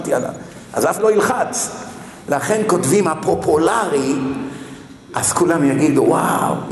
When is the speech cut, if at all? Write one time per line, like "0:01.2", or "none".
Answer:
0:01.0

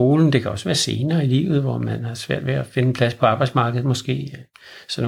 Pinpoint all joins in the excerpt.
none

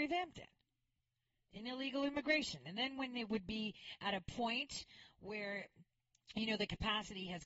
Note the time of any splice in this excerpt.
none

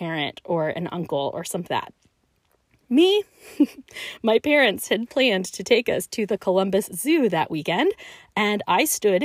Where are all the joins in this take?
0:01.7

